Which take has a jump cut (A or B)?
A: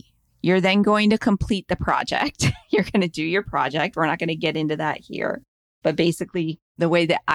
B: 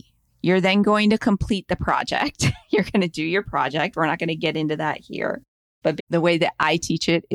B